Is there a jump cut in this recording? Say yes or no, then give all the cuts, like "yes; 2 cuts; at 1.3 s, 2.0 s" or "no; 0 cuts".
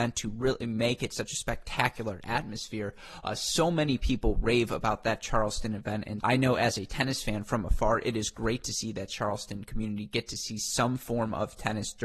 yes; 1 cut; at 6.2 s